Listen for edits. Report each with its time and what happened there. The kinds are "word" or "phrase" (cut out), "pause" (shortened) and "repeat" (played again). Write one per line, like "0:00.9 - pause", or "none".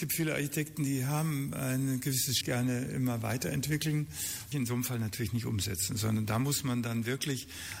0:02.4 - phrase
0:04.5 - phrase